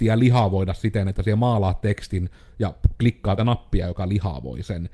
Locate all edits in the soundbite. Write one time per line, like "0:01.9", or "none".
0:03.4